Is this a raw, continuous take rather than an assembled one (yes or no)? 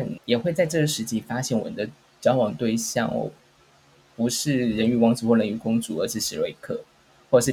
yes